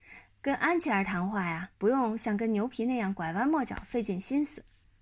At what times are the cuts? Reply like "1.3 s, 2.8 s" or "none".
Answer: 1.7 s